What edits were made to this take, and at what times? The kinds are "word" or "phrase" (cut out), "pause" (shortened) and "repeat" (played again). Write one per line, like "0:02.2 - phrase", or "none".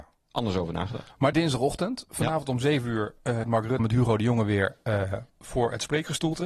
0:01.3 - phrase
0:03.4 - word
0:03.8 - word
0:05.3 - pause